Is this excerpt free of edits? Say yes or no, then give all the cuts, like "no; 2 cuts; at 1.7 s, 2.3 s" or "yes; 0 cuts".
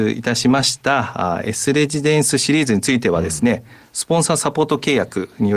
yes; 0 cuts